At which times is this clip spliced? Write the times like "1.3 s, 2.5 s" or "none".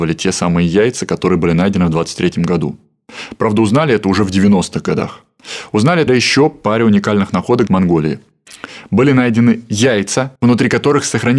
6.1 s, 7.7 s, 10.4 s